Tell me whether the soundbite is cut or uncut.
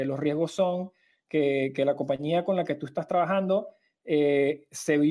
uncut